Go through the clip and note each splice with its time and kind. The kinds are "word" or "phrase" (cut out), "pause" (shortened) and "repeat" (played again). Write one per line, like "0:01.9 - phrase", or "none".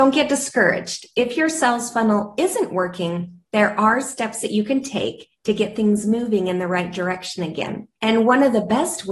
none